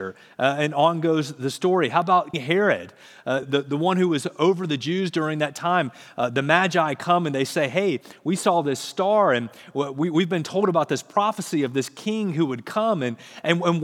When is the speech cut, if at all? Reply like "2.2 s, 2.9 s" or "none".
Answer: 2.3 s, 3.4 s